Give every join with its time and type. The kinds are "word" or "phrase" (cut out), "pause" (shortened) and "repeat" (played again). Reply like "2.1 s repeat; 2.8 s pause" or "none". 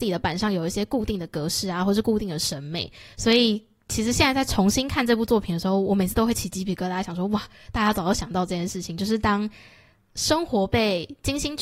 none